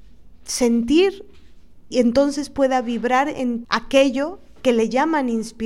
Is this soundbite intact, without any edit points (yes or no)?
no